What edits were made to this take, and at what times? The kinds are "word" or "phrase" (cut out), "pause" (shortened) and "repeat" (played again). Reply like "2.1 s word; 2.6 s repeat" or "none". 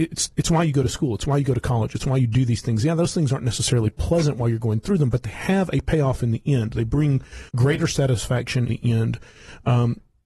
7.5 s pause; 8.7 s word